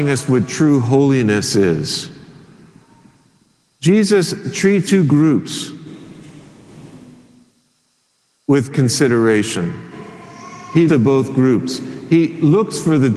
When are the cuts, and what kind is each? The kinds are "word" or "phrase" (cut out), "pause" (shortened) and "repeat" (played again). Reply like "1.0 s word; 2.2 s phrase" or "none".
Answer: 4.8 s word; 8.7 s word; 10.9 s word